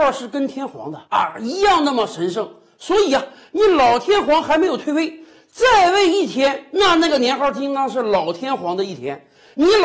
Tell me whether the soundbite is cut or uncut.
cut